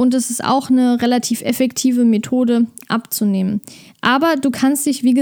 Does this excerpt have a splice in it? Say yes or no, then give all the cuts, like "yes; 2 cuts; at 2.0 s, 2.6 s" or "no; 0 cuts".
no; 0 cuts